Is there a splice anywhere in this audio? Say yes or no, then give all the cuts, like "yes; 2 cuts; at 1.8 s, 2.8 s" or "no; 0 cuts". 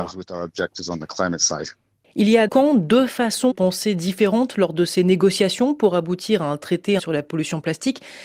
yes; 3 cuts; at 2.5 s, 3.5 s, 7.0 s